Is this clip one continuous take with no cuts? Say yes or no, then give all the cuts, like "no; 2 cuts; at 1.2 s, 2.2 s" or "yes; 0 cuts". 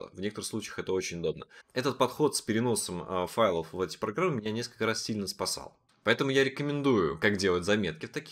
yes; 0 cuts